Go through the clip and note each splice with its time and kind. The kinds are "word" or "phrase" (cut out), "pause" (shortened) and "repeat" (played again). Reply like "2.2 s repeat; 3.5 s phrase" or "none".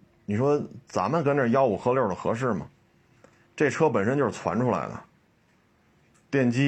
none